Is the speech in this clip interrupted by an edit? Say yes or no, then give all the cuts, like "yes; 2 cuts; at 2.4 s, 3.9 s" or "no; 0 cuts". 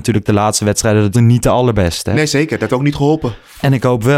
yes; 2 cuts; at 1.1 s, 2.7 s